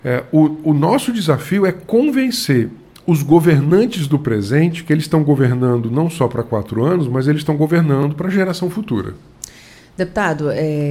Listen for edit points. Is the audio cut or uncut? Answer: uncut